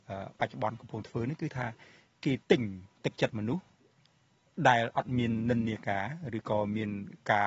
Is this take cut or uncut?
cut